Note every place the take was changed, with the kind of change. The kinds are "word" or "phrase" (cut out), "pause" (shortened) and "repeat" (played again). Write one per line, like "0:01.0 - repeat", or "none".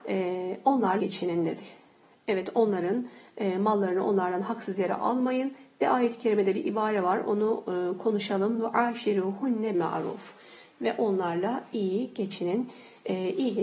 0:01.0 - word
0:09.7 - word